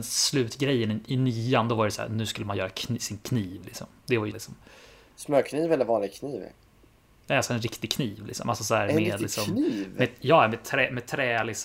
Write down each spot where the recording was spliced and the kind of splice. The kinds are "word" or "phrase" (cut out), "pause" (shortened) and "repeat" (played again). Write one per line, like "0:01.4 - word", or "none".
0:04.3 - word